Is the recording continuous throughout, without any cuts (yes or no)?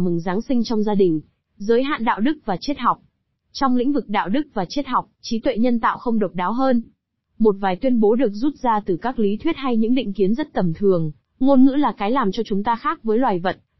yes